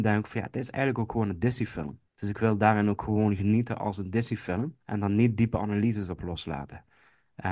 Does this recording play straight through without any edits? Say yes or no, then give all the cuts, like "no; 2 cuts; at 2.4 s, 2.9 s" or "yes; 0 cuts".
no; 2 cuts; at 2.1 s, 4.8 s